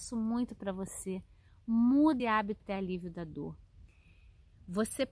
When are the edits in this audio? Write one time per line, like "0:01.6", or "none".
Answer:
0:02.2
0:02.6